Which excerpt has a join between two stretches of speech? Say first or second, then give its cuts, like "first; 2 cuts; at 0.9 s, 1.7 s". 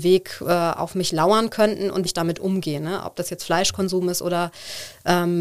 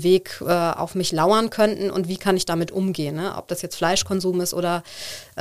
first; 1 cut; at 2.1 s